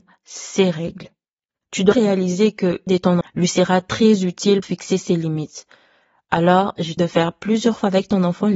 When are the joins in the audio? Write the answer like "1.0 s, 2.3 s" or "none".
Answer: 1.9 s, 2.9 s, 3.2 s, 4.6 s, 7.0 s